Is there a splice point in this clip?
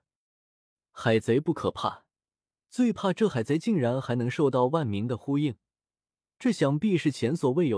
no; 0 cuts

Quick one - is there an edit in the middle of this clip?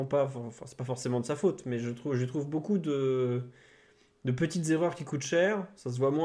no; 0 cuts

